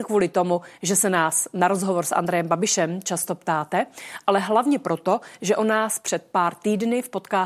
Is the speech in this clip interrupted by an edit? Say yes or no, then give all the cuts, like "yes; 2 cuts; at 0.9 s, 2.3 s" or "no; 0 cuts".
no; 0 cuts